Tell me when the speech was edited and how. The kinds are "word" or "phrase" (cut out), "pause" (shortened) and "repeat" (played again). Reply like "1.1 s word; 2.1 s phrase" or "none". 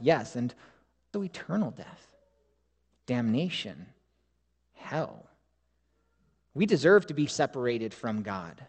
1.1 s word; 7.3 s word